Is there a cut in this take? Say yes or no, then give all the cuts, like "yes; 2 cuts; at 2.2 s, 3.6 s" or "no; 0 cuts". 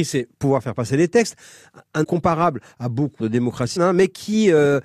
yes; 3 cuts; at 2.0 s, 3.2 s, 3.8 s